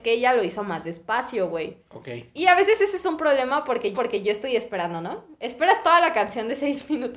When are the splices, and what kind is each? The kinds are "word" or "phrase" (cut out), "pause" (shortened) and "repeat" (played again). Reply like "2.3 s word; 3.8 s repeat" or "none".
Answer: 3.9 s repeat